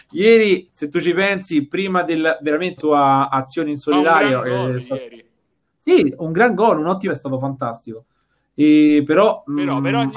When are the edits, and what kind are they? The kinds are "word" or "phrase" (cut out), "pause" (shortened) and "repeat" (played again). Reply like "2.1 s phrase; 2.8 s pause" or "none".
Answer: 2.8 s word; 7.1 s phrase